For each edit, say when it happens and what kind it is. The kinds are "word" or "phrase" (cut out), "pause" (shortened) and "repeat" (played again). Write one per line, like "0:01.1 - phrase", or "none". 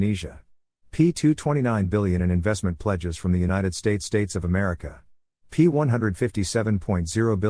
0:04.0 - repeat